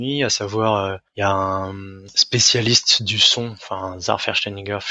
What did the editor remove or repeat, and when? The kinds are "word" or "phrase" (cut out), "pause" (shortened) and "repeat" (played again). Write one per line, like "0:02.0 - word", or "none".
none